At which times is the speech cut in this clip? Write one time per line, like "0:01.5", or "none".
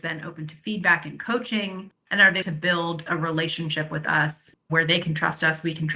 0:02.4